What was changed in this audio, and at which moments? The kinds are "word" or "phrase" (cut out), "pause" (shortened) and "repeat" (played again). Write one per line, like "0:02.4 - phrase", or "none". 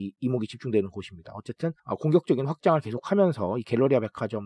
0:01.8 - pause